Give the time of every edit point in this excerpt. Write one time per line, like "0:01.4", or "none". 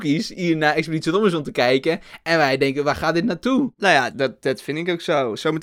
0:04.1